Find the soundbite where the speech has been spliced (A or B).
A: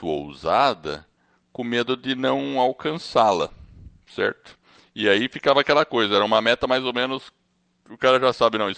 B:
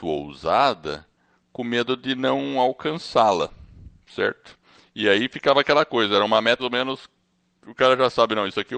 B